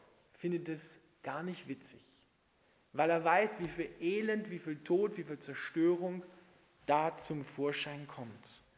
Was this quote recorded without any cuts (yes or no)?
yes